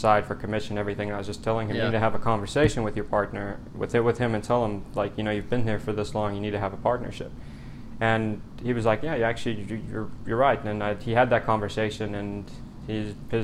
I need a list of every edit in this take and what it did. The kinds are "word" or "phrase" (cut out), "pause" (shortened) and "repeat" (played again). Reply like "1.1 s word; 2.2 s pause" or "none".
none